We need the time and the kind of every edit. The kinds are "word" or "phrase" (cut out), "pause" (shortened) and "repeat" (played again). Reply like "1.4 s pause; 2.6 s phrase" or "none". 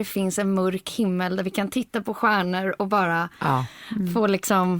none